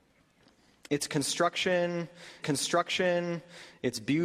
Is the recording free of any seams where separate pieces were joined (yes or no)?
no